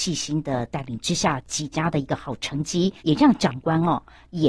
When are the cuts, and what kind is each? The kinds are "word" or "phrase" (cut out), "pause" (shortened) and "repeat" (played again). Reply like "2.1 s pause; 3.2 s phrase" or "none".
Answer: 3.0 s pause